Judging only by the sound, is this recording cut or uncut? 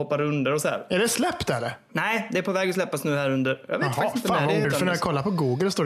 cut